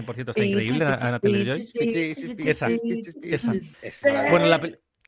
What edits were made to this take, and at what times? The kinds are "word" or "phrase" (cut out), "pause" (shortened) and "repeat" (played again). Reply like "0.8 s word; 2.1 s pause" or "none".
3.7 s pause